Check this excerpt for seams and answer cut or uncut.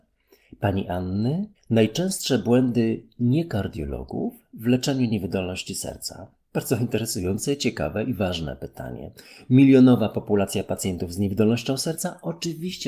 cut